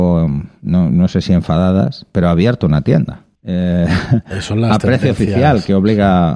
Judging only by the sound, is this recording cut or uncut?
cut